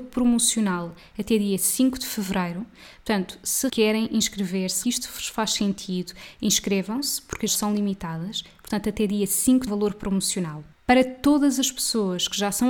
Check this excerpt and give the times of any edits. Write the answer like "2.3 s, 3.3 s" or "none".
3.7 s, 4.8 s, 7.5 s, 9.7 s, 10.7 s